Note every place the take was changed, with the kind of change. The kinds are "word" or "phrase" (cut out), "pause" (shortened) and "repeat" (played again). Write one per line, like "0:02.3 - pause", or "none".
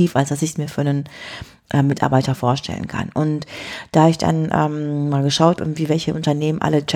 0:05.6 - word